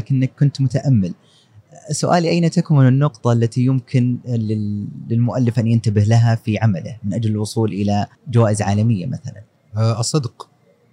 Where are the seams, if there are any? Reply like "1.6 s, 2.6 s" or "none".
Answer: 8.1 s